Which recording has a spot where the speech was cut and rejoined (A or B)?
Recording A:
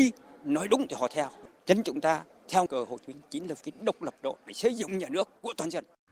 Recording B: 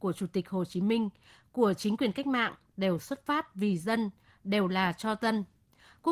A